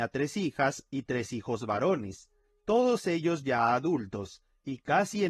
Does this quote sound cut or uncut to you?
uncut